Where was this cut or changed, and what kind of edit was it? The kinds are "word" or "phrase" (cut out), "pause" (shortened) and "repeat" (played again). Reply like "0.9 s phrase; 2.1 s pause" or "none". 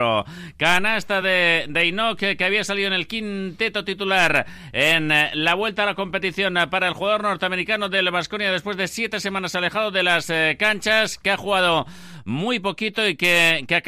none